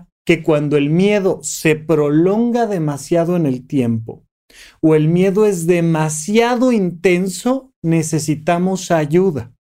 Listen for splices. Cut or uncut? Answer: uncut